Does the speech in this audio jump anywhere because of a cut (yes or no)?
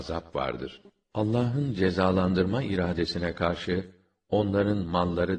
no